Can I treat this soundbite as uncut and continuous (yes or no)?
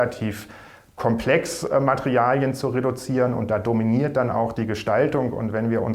yes